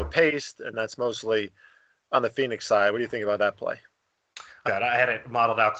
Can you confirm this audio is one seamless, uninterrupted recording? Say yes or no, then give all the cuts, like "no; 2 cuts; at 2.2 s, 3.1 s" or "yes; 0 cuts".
no; 1 cut; at 4.6 s